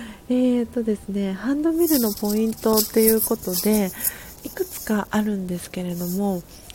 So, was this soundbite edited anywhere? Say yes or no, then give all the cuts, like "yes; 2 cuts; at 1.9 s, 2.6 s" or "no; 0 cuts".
yes; 1 cut; at 4.4 s